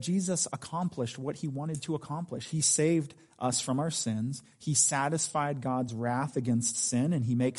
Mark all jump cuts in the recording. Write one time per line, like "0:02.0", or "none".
none